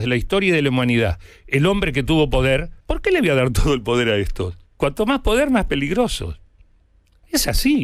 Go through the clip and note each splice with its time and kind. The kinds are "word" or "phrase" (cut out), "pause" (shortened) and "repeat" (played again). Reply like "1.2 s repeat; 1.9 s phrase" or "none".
2.8 s pause; 4.7 s pause